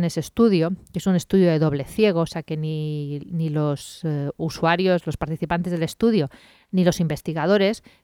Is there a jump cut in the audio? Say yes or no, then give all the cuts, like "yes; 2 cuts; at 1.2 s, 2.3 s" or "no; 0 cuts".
no; 0 cuts